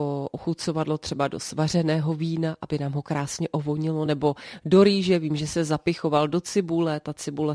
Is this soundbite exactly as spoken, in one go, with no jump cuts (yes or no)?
yes